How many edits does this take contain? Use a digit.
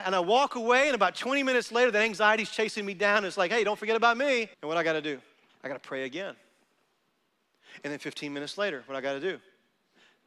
2